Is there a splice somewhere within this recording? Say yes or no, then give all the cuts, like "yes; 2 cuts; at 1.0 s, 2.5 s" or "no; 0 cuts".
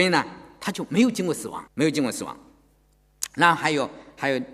yes; 1 cut; at 1.7 s